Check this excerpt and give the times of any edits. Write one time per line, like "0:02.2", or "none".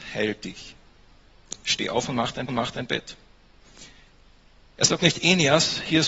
0:02.5